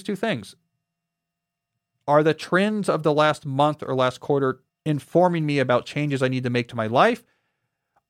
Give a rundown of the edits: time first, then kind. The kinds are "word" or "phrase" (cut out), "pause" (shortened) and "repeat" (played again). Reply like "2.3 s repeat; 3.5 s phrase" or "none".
4.7 s pause